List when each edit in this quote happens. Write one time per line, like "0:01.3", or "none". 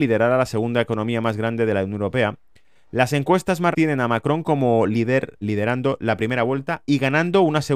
0:03.7
0:05.4